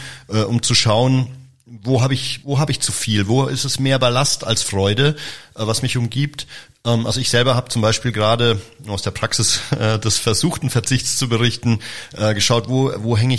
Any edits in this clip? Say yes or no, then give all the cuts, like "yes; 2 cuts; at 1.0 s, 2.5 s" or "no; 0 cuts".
yes; 1 cut; at 2.4 s